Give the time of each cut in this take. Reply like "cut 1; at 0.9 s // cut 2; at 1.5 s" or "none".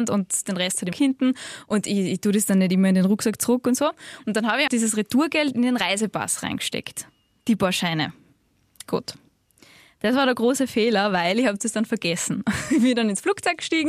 cut 1; at 0.9 s // cut 2; at 4.7 s

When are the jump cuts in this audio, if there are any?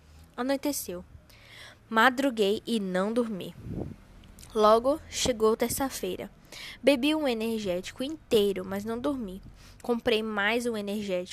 none

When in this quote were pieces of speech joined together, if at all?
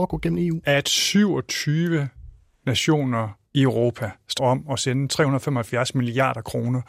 cut 1; at 3.5 s // cut 2; at 4.4 s

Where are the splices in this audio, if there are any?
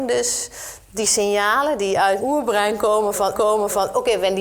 cut 1; at 2.2 s // cut 2; at 3.3 s

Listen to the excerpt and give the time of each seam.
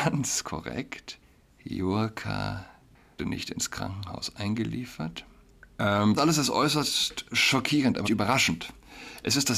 cut 1; at 3.2 s // cut 2; at 6.2 s // cut 3; at 8.0 s

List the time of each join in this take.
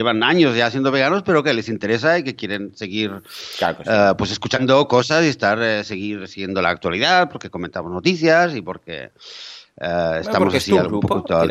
none

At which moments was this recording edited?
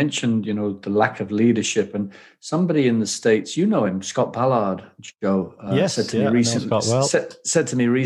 none

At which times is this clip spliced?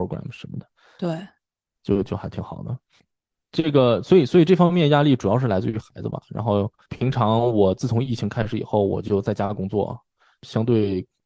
none

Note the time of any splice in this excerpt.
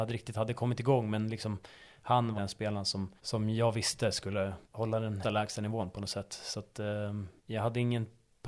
cut 1; at 2.4 s // cut 2; at 3.2 s // cut 3; at 4.6 s // cut 4; at 5.2 s // cut 5; at 7.4 s

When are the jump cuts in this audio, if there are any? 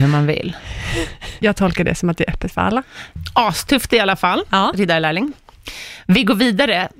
cut 1; at 1.4 s

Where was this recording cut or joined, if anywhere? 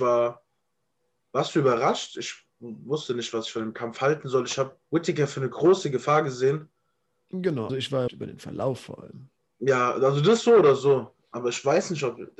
cut 1; at 4.8 s // cut 2; at 7.7 s // cut 3; at 8.1 s // cut 4; at 9.4 s

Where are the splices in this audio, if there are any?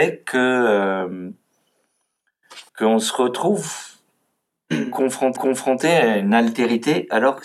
cut 1; at 2.7 s // cut 2; at 5.4 s

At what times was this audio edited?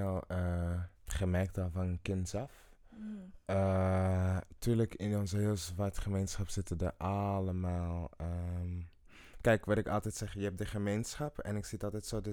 cut 1; at 0.9 s

